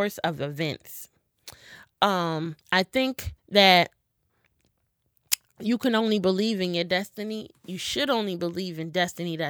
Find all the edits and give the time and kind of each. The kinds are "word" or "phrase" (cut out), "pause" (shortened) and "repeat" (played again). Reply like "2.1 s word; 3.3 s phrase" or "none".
2.6 s pause; 3.4 s pause